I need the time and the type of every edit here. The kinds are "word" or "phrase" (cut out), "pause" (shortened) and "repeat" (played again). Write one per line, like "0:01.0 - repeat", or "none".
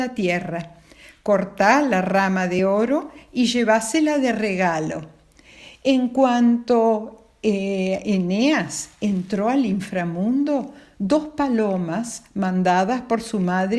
none